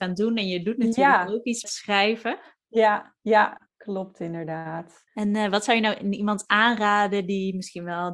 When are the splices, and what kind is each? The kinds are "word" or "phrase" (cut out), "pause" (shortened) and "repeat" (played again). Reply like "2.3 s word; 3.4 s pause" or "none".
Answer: 1.6 s word; 3.7 s pause; 5.1 s pause